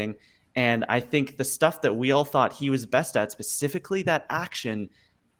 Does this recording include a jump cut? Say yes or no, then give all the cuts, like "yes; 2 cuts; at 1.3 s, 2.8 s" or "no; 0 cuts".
no; 0 cuts